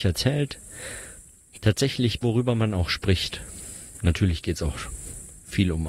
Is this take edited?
yes; 1 cut; at 2.2 s

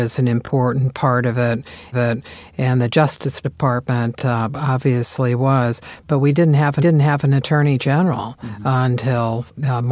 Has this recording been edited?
yes; 2 cuts; at 1.9 s, 6.8 s

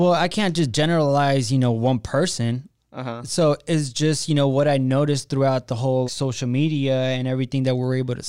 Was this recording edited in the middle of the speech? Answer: yes; 1 cut; at 6.1 s

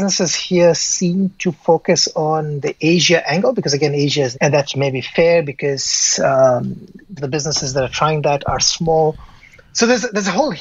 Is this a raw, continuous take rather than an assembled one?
no; 2 cuts; at 4.3 s, 7.2 s

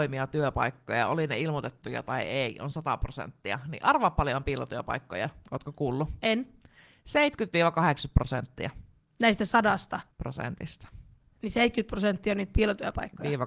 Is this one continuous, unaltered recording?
no; 2 cuts; at 9.0 s, 10.1 s

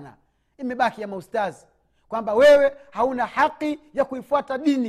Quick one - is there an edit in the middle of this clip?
no; 0 cuts

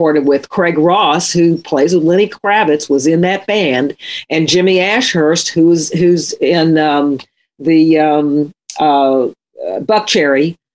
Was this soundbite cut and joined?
no; 0 cuts

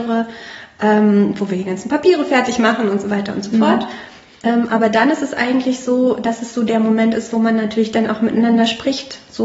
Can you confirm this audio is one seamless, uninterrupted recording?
yes; 0 cuts

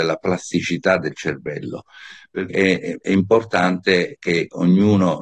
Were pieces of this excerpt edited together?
yes; 2 cuts; at 2.5 s, 4.1 s

